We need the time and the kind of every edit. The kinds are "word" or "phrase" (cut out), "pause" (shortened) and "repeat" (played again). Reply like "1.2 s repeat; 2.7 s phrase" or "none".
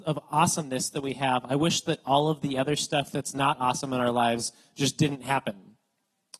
none